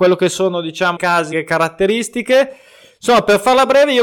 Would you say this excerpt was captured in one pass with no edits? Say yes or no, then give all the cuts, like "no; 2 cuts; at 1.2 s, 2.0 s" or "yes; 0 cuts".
no; 2 cuts; at 1.0 s, 1.3 s